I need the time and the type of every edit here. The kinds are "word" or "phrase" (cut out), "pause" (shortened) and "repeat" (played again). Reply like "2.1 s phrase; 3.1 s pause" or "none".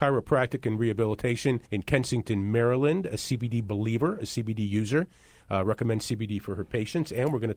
1.6 s pause